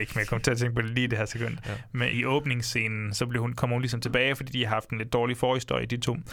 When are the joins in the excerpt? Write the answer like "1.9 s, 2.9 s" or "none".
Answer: 2.1 s